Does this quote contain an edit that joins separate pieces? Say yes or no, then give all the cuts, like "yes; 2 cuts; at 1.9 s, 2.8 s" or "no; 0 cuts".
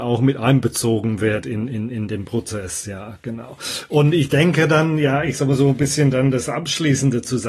no; 0 cuts